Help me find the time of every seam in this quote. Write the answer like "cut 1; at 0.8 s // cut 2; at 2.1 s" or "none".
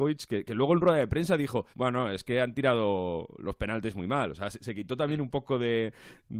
cut 1; at 1.7 s